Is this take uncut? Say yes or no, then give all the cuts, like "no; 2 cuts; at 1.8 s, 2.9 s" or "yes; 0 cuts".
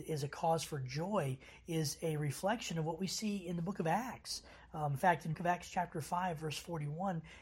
no; 1 cut; at 5.3 s